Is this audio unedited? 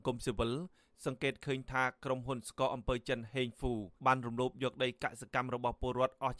no; 1 cut; at 4.0 s

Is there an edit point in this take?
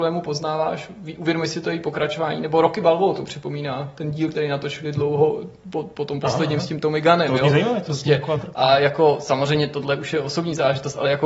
no; 0 cuts

